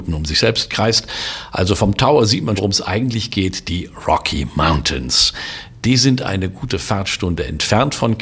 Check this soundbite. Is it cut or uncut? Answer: cut